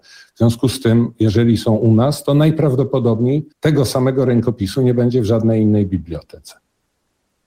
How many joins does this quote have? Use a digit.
1